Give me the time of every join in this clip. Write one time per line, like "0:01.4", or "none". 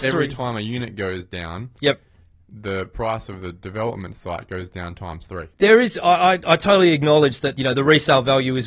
none